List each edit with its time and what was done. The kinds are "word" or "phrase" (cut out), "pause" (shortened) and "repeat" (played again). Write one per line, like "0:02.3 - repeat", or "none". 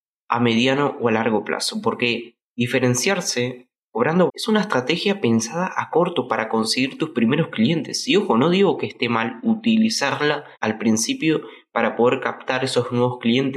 0:02.5 - pause
0:04.3 - word
0:06.3 - word
0:10.5 - pause